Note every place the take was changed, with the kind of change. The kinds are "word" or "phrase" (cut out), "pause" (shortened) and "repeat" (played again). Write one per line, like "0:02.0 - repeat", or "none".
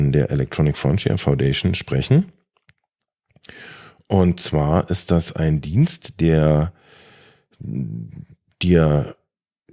none